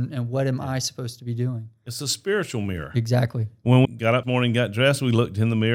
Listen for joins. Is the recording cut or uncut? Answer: cut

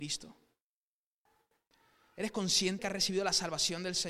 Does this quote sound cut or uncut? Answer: cut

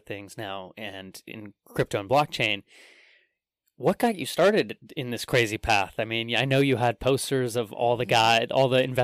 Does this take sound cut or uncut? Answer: uncut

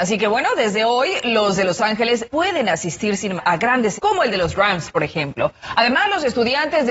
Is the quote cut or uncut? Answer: cut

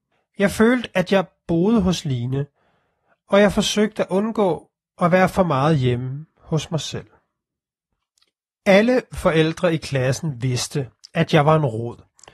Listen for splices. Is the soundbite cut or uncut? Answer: uncut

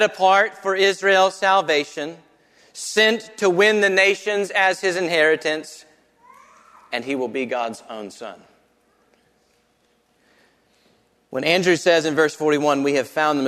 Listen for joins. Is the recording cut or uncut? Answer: uncut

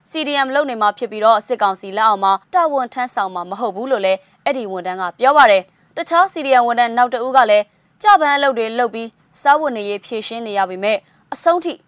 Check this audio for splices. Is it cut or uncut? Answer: cut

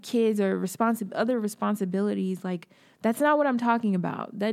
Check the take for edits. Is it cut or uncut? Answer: uncut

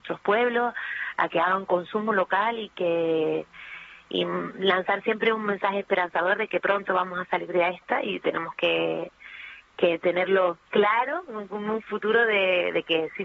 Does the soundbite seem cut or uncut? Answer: uncut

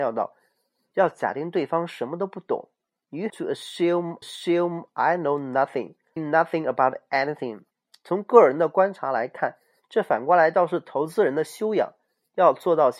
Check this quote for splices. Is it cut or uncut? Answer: cut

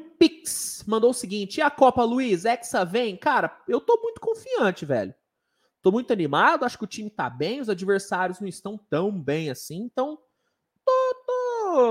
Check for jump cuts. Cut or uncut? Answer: uncut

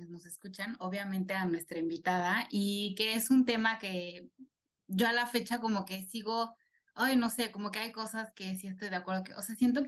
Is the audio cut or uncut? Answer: uncut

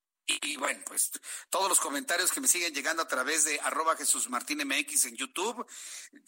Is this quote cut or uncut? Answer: uncut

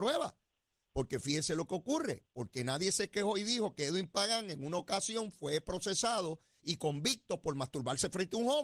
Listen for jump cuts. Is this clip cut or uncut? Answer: uncut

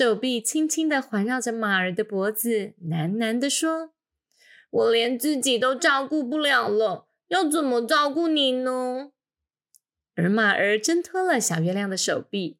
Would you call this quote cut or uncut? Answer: uncut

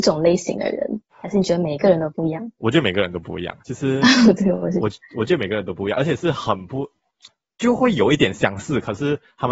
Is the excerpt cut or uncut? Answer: cut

